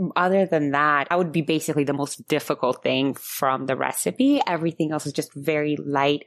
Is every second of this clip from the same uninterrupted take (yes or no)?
no